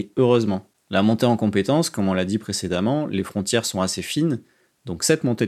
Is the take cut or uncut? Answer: uncut